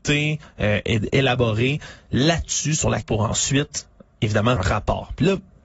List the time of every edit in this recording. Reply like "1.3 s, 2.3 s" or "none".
3.0 s, 4.6 s